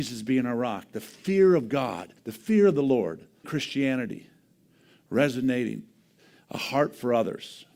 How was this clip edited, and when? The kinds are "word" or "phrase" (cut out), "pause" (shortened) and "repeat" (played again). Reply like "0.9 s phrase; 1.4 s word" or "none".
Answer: 2.2 s pause; 3.4 s word